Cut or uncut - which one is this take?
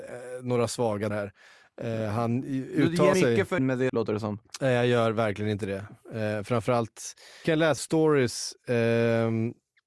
cut